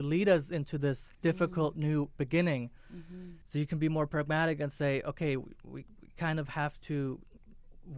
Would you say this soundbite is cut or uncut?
cut